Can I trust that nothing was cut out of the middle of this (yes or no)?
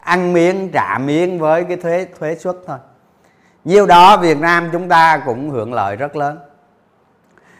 yes